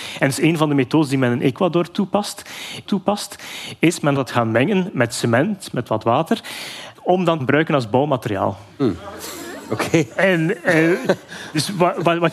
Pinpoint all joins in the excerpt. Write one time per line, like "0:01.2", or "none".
0:02.8
0:04.2
0:05.1
0:06.9
0:07.4